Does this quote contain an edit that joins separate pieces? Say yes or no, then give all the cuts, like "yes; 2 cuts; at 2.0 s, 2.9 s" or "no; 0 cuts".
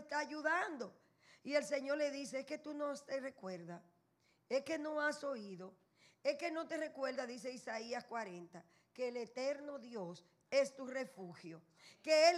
no; 0 cuts